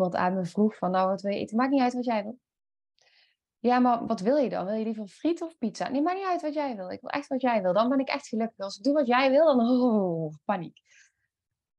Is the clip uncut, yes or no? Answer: yes